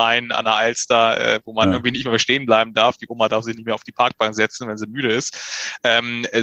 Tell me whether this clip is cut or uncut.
uncut